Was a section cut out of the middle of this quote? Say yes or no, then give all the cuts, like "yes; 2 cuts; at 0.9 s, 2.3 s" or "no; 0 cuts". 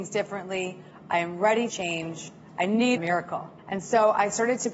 yes; 3 cuts; at 1.7 s, 3.0 s, 3.6 s